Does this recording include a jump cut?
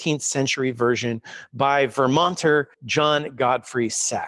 yes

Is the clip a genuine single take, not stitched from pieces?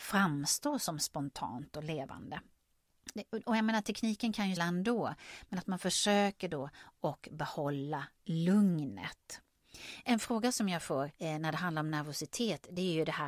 no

